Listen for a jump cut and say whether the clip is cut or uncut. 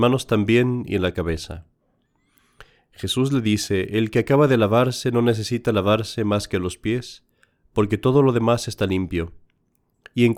uncut